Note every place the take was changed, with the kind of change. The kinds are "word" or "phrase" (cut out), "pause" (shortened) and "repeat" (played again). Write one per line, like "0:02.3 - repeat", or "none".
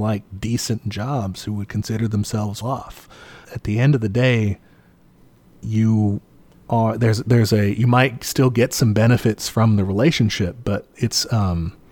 0:02.6 - word
0:03.4 - word

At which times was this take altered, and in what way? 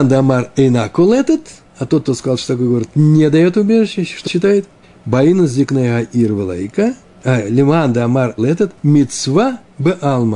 0:04.3 - word
0:04.8 - pause
0:08.4 - word
0:08.8 - pause

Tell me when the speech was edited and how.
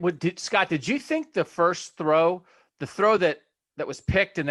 none

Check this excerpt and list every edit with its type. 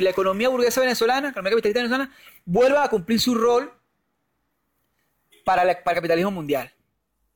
none

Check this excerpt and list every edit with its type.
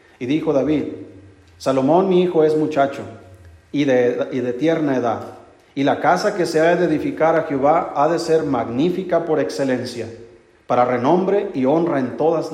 none

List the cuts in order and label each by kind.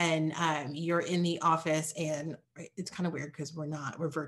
0:02.4 - pause

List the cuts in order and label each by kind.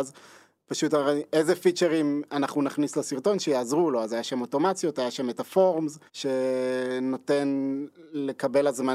0:06.1 - pause

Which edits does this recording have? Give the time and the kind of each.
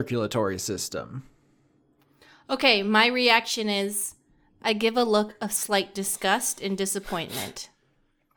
none

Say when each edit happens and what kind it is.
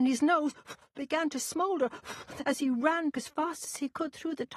0:03.1 - word

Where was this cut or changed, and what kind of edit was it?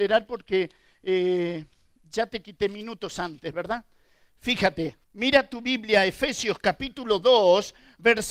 0:05.0 - pause

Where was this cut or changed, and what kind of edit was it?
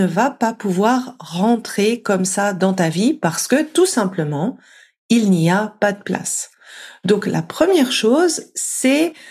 none

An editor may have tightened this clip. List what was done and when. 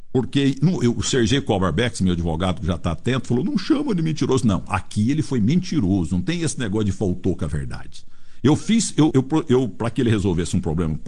0:09.1 - word

